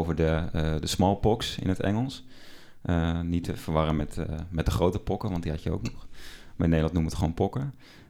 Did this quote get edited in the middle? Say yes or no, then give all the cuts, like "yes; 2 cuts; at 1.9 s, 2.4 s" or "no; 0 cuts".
no; 0 cuts